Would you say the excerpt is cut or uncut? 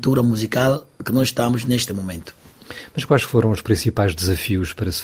uncut